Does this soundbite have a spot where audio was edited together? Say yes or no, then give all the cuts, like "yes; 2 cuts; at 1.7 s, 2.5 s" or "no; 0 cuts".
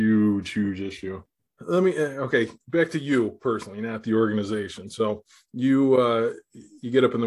no; 0 cuts